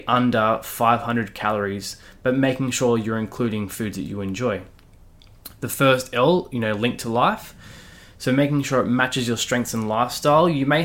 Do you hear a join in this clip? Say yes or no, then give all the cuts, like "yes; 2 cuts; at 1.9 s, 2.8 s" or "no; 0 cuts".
no; 0 cuts